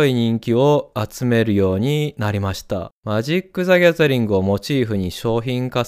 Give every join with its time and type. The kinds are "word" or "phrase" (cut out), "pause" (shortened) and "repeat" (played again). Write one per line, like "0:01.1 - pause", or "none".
0:03.0 - pause